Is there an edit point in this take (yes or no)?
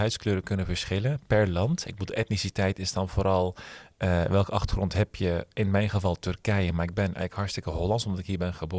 no